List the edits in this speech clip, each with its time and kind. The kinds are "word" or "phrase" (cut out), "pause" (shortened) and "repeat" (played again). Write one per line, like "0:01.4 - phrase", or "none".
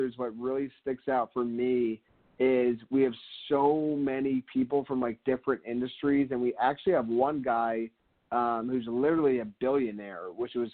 none